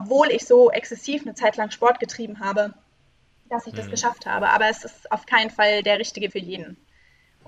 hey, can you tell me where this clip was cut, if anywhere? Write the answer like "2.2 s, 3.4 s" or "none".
6.3 s